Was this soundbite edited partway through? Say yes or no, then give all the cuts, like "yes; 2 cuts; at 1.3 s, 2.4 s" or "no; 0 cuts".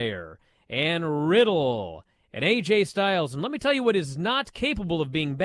no; 0 cuts